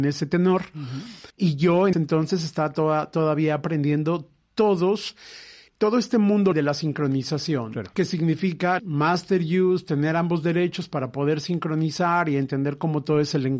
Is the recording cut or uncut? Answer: cut